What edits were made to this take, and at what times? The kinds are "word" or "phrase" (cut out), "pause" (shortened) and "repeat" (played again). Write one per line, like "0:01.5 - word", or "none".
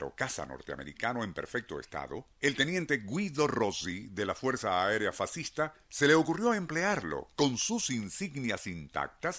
0:02.3 - pause
0:05.8 - pause